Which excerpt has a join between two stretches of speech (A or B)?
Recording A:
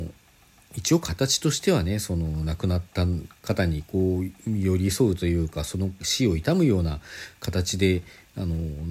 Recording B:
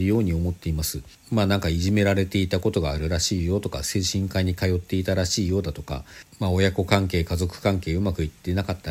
B